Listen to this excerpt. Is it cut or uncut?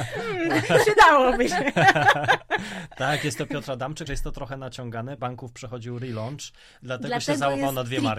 cut